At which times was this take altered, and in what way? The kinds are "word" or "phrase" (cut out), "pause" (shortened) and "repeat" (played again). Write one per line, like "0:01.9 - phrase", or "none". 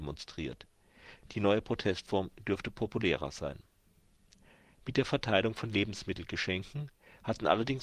none